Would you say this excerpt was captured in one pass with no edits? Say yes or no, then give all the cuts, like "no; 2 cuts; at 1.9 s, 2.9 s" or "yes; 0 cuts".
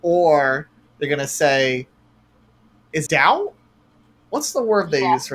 no; 1 cut; at 3.1 s